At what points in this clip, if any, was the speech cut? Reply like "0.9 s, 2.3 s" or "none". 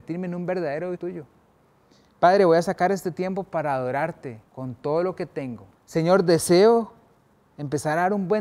1.0 s, 4.5 s, 5.7 s